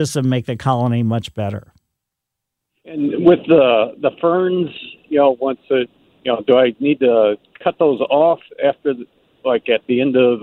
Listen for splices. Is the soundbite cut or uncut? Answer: uncut